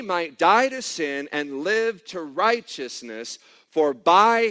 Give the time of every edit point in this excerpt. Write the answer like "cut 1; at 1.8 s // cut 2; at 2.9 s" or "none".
none